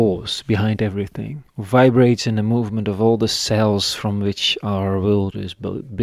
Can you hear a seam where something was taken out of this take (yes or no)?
yes